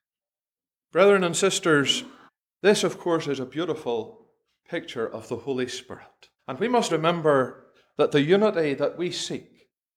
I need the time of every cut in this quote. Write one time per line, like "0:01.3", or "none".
0:02.3
0:04.5
0:06.4
0:06.9